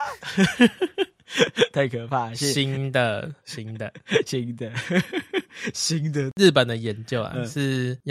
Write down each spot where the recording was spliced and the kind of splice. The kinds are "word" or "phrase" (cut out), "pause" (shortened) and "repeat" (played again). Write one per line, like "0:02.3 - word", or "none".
0:03.4 - pause